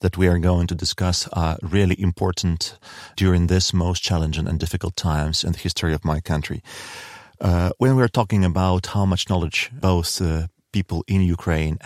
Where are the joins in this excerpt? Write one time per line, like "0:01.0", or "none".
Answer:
none

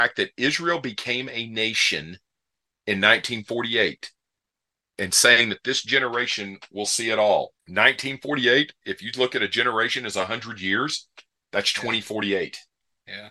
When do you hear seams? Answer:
0:07.6

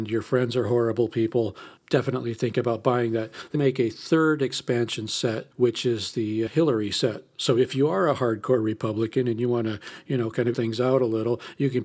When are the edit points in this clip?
0:01.8
0:03.5
0:05.5
0:06.5
0:10.5

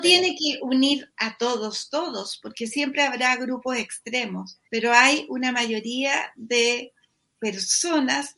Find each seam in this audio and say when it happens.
0:04.6

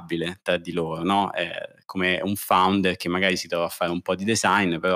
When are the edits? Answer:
none

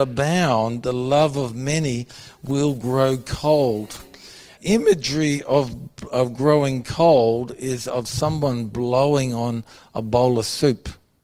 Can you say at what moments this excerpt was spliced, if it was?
0:04.6

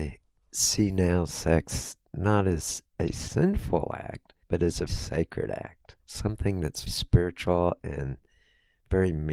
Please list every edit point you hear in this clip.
0:02.9
0:04.4
0:04.9
0:06.0
0:06.9

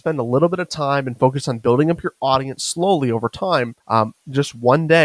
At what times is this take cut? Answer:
0:03.8

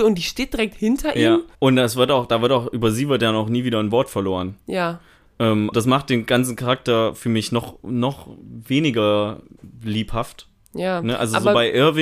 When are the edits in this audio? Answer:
0:01.5
0:05.7

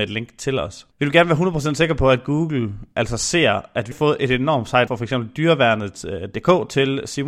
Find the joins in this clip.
0:00.9
0:03.9
0:04.9

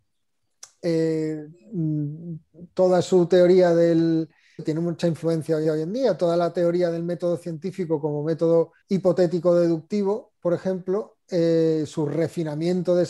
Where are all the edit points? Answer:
0:04.6
0:05.6
0:08.8

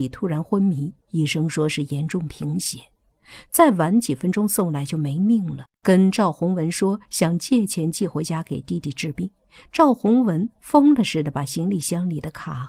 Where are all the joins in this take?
0:01.0
0:05.7

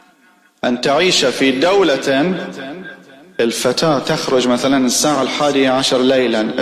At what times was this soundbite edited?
none

